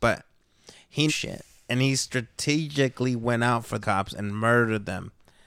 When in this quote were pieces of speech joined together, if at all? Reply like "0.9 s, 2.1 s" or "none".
1.1 s, 3.8 s